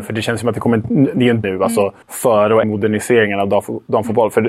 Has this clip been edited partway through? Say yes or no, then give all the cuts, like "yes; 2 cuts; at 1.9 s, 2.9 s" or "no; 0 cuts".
yes; 3 cuts; at 1.4 s, 2.0 s, 2.6 s